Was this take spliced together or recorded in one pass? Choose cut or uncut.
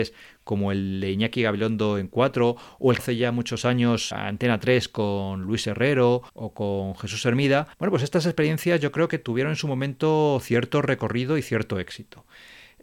cut